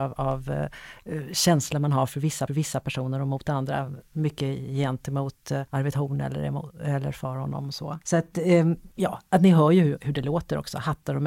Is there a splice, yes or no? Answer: yes